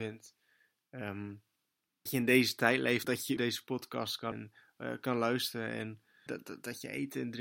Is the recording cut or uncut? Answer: cut